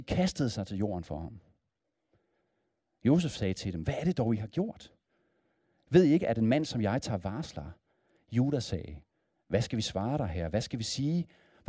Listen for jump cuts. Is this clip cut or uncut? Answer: uncut